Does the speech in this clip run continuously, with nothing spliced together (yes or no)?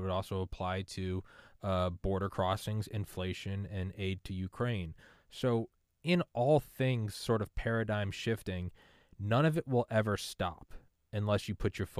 yes